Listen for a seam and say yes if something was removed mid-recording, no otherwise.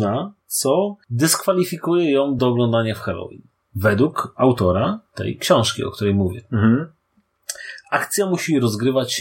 no